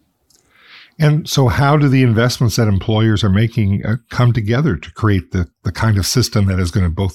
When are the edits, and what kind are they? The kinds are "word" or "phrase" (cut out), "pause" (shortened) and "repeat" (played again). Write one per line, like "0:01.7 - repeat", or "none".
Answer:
none

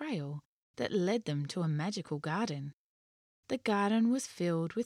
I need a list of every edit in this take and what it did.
none

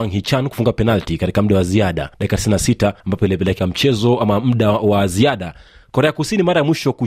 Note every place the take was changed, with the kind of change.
0:02.1 - pause
0:03.0 - pause
0:03.6 - phrase

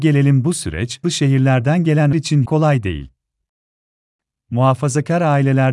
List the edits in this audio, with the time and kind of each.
0:01.0 - word
0:02.1 - word
0:02.5 - phrase

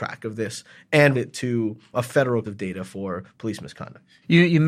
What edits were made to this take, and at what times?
0:01.1 - word
0:01.9 - word
0:02.4 - word

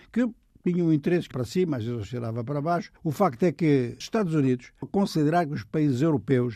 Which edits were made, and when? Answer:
0:01.3 - word
0:03.0 - pause
0:04.0 - word
0:04.8 - word

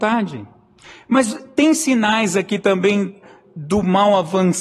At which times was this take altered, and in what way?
none

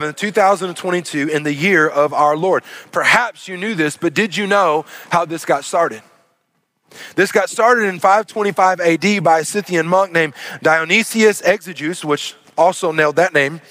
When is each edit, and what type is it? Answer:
none

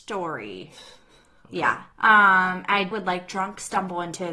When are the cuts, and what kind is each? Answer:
0:01.9 - pause
0:02.9 - word

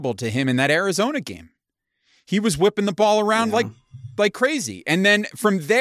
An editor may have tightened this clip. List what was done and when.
none

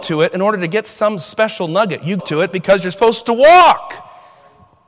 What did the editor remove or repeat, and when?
0:02.2 - word

